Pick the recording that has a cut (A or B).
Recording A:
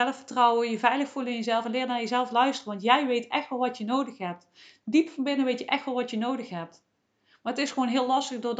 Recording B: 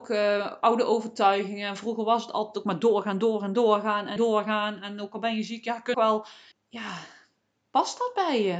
B